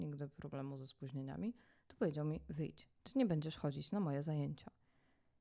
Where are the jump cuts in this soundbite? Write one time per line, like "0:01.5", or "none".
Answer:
none